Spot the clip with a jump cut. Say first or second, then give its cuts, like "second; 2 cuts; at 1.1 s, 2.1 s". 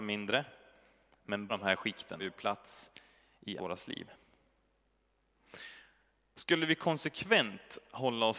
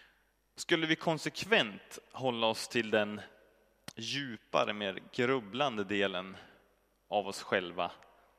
first; 3 cuts; at 1.5 s, 2.2 s, 3.6 s